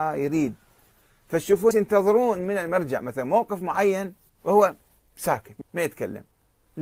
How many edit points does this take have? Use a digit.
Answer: 3